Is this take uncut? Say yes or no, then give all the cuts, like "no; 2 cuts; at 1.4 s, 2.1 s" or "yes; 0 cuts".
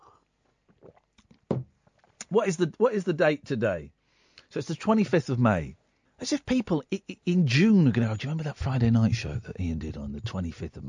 no; 1 cut; at 6.1 s